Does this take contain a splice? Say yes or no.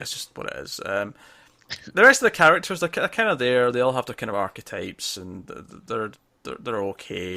no